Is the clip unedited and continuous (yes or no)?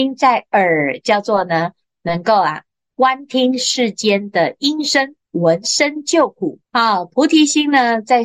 no